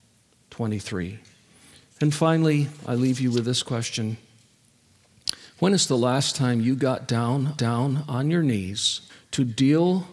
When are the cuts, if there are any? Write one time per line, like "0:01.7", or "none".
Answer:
0:07.6
0:09.1